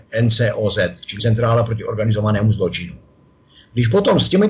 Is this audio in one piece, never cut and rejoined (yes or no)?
no